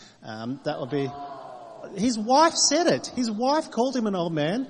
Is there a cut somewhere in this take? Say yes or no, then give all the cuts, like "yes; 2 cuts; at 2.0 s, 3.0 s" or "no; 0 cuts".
no; 0 cuts